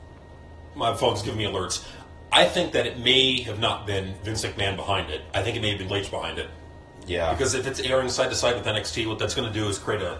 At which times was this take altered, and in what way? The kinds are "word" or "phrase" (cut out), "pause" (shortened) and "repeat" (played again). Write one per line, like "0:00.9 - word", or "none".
0:05.9 - word